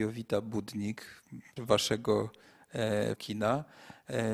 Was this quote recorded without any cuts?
no; 2 cuts; at 1.6 s, 3.2 s

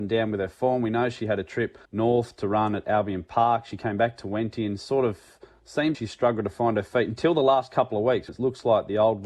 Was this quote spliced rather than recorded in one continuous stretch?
yes; 3 cuts; at 1.8 s, 5.9 s, 8.3 s

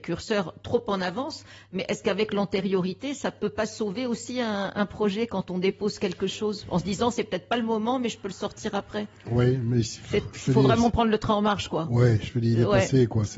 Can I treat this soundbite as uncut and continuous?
yes; 0 cuts

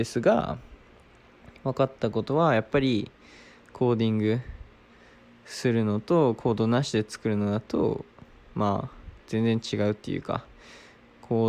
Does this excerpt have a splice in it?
no; 0 cuts

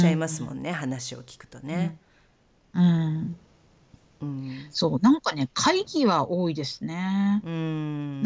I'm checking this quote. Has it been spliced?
no; 0 cuts

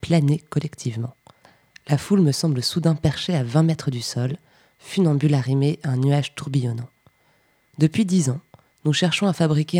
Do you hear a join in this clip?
no; 0 cuts

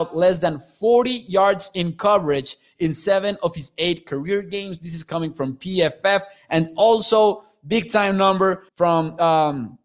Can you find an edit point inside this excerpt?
yes; 1 cut; at 8.7 s

